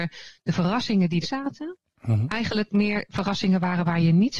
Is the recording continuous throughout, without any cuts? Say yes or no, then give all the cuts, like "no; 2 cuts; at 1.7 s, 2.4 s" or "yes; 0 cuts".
no; 1 cut; at 1.2 s